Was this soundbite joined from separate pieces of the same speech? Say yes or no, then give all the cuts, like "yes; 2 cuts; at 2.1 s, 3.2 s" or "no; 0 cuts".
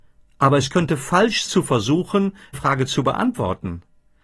yes; 2 cuts; at 1.5 s, 2.5 s